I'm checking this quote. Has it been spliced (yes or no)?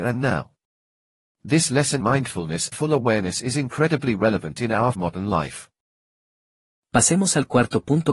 yes